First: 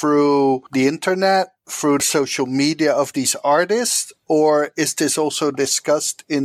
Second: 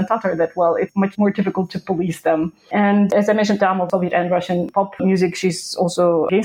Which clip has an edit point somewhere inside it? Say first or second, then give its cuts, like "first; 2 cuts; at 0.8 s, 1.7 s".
second; 1 cut; at 3.6 s